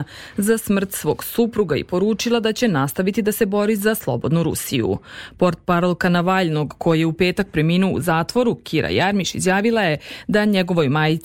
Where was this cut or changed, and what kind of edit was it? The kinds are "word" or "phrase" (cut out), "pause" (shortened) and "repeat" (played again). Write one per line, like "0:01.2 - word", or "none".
none